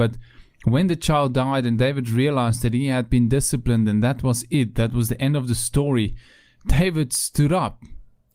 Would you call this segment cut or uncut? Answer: uncut